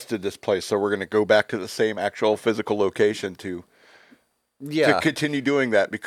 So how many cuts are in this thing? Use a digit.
0